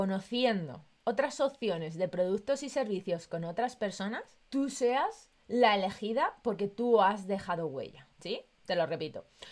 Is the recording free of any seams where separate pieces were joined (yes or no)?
no